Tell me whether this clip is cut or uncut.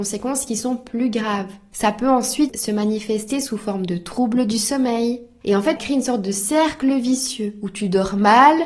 cut